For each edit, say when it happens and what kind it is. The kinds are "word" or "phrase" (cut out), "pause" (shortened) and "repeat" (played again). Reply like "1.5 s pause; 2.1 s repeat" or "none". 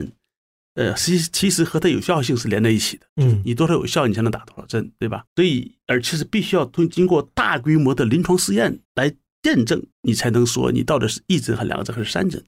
3.1 s pause; 5.3 s pause; 8.8 s pause; 9.9 s pause